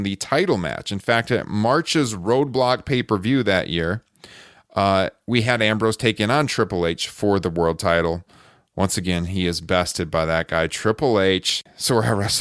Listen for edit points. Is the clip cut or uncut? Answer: uncut